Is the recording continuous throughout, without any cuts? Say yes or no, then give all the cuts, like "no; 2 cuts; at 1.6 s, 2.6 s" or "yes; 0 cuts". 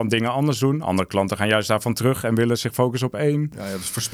yes; 0 cuts